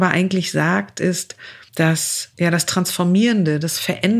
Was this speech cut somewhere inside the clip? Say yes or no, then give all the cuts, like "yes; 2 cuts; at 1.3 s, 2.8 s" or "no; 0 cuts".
no; 0 cuts